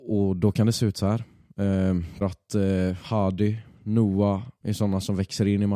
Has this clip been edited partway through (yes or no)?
yes